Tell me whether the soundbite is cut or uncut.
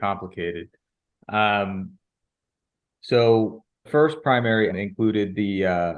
cut